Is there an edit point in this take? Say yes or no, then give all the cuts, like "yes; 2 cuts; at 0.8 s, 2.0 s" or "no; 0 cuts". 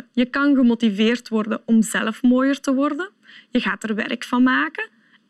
no; 0 cuts